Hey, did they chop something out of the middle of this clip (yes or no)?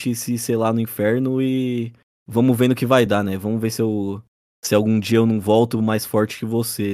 no